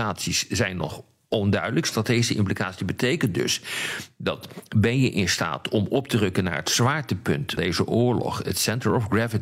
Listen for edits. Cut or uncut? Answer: cut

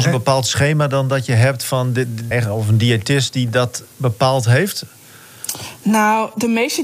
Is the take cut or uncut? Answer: cut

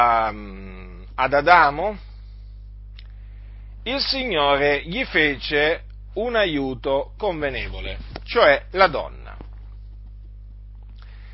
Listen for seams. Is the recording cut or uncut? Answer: uncut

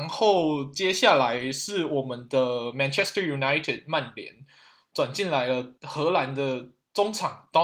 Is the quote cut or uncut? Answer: cut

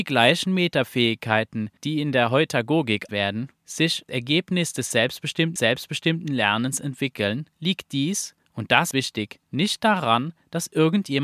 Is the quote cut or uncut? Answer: cut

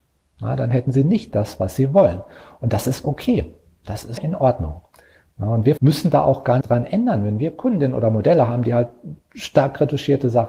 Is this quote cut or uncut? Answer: cut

